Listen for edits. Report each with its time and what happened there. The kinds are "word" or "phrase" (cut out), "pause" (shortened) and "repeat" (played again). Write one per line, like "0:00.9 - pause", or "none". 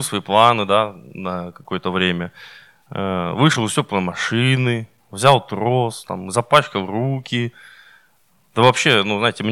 none